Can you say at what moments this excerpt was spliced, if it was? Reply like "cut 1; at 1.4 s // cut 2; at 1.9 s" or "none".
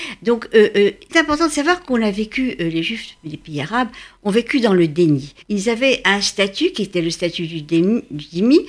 cut 1; at 1.1 s // cut 2; at 5.4 s